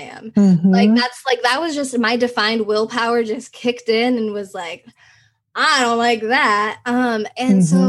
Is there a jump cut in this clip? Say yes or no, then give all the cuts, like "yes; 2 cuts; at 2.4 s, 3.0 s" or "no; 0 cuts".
no; 0 cuts